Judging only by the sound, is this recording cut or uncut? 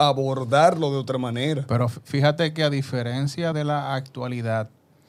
cut